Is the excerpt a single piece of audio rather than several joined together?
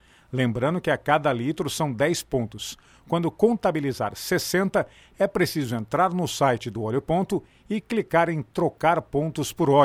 yes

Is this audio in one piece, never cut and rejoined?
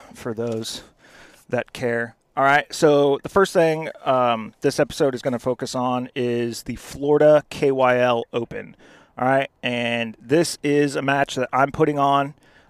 yes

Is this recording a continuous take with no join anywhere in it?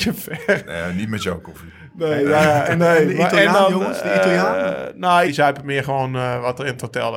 no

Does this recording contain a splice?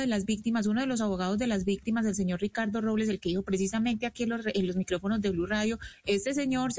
no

